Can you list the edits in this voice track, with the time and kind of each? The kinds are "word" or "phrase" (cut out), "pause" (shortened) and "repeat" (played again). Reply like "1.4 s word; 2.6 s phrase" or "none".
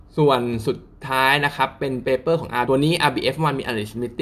2.7 s word